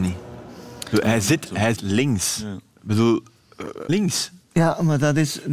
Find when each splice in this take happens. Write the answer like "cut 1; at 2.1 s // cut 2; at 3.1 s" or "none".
cut 1; at 1.7 s // cut 2; at 3.9 s